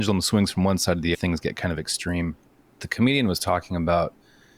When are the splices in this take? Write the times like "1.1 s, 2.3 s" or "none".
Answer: 1.1 s, 2.8 s